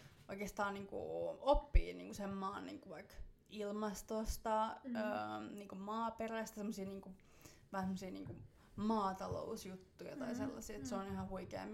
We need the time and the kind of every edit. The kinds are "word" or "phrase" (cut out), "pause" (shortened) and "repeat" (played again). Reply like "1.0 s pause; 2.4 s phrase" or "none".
3.4 s pause